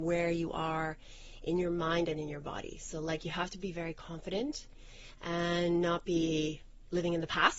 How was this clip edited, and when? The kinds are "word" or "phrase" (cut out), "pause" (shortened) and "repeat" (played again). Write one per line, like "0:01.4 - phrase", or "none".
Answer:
none